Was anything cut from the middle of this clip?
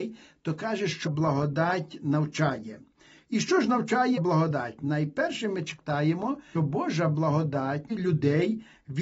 yes; 4 cuts; at 1.1 s, 4.2 s, 6.6 s, 7.9 s

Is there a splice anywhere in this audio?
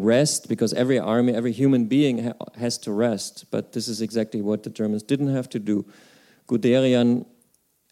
no; 0 cuts

